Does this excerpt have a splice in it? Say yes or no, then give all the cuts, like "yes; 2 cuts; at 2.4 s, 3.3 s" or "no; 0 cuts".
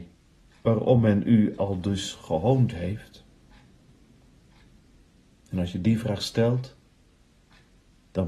no; 0 cuts